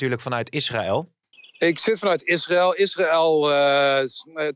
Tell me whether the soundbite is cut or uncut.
cut